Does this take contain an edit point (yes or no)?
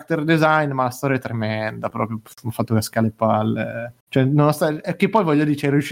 no